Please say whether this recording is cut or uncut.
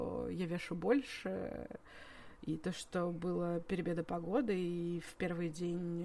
uncut